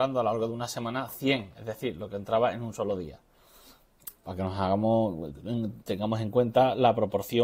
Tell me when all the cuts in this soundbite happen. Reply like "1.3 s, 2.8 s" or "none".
4.2 s